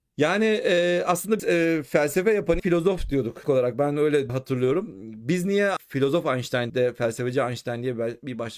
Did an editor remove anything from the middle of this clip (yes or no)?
yes